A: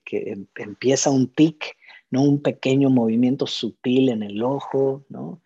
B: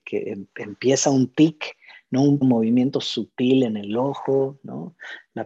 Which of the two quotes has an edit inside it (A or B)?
B